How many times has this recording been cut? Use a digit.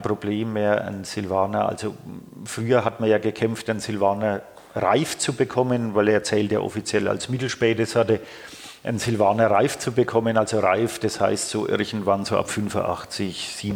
0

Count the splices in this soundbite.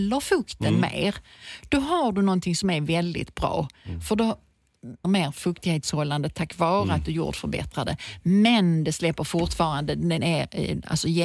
1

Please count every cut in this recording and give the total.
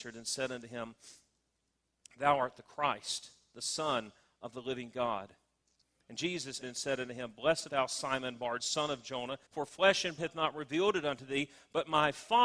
5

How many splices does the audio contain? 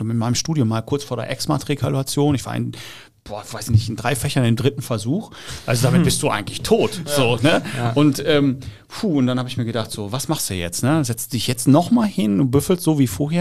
0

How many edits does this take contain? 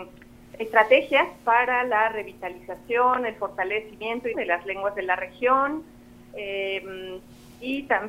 1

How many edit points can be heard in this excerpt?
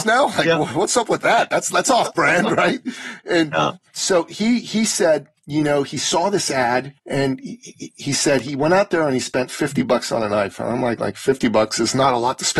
1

